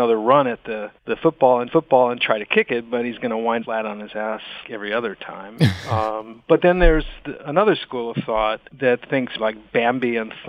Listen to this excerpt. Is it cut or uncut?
cut